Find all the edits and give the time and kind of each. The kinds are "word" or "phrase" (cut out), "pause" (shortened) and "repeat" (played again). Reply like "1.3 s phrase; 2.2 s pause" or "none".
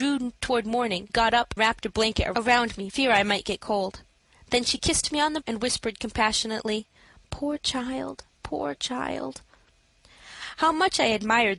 1.1 s word; 1.6 s word; 2.9 s word; 5.4 s word; 8.3 s word